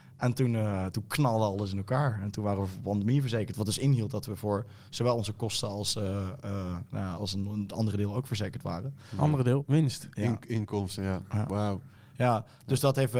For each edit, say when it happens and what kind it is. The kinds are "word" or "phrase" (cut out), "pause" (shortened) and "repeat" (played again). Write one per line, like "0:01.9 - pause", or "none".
0:07.2 - word